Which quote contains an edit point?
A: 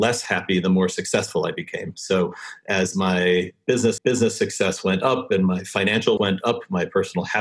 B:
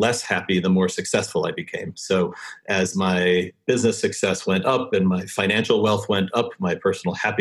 A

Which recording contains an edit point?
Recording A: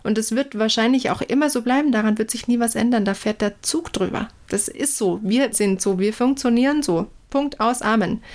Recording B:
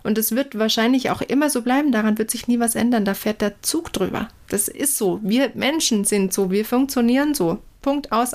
A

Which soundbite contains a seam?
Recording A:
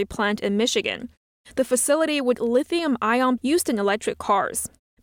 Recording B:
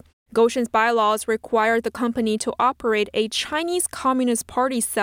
A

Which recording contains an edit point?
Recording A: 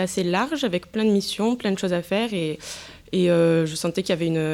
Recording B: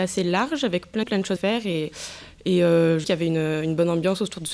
B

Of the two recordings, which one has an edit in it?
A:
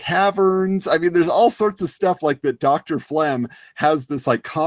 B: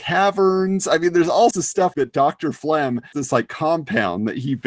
B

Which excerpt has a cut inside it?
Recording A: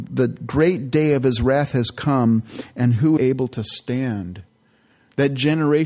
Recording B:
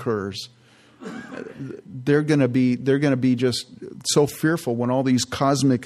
A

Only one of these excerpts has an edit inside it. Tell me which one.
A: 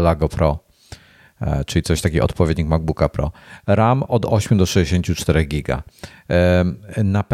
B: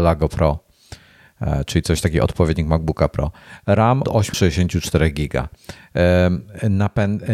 B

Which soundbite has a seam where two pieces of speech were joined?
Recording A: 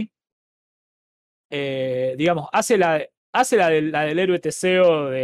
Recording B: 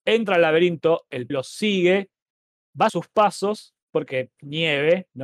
B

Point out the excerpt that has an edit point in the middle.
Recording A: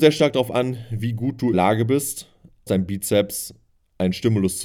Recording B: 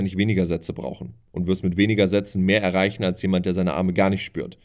A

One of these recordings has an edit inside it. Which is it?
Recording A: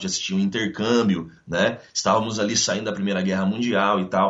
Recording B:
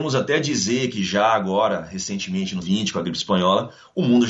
B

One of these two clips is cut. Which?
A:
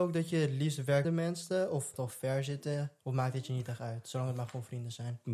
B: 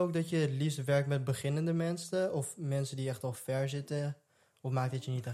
A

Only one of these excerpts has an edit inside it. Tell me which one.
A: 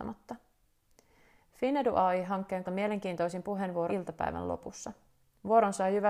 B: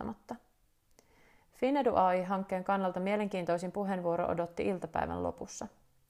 A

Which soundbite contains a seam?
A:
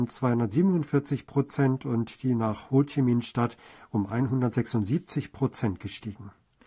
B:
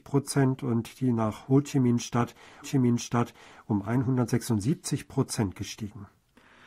B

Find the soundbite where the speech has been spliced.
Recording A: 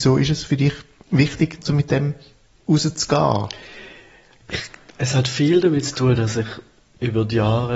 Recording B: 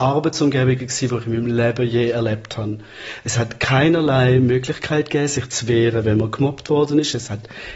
A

